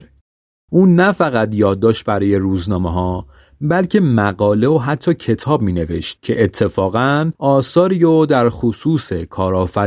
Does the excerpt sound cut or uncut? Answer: uncut